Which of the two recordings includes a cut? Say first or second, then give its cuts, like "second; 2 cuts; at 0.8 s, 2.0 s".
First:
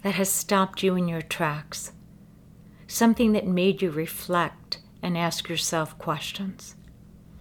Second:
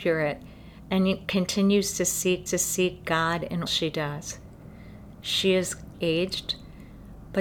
second; 3 cuts; at 2.5 s, 3.7 s, 5.9 s